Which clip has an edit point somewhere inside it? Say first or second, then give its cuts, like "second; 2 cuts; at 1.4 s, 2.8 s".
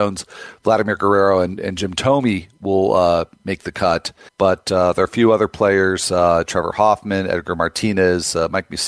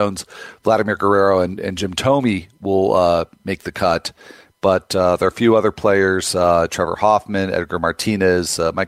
first; 1 cut; at 4.3 s